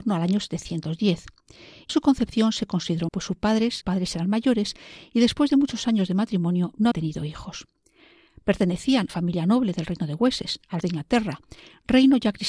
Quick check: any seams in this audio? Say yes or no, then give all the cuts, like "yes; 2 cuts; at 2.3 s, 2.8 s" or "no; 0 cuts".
yes; 6 cuts; at 1.9 s, 3.1 s, 3.8 s, 6.9 s, 9.1 s, 10.8 s